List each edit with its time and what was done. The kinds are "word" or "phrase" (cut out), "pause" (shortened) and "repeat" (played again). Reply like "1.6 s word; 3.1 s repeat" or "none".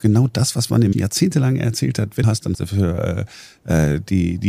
0.9 s word; 2.2 s phrase; 2.5 s word